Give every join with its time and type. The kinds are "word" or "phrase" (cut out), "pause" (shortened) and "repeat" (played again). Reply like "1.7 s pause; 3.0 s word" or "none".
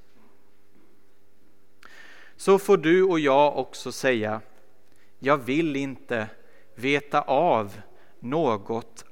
none